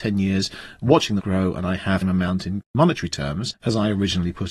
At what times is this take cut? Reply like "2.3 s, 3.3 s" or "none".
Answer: 1.2 s, 2.0 s, 2.7 s